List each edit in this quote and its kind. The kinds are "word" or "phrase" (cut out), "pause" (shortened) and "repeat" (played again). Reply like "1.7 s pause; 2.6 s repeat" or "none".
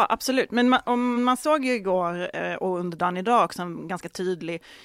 1.2 s word